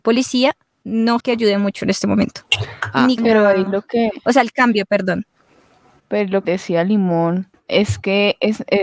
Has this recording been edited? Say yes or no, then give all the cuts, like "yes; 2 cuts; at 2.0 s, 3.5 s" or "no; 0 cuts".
yes; 3 cuts; at 1.2 s, 3.2 s, 6.4 s